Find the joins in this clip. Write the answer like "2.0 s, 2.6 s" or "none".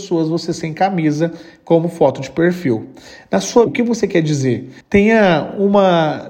3.7 s, 4.8 s